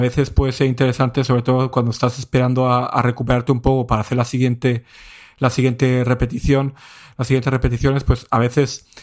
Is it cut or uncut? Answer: uncut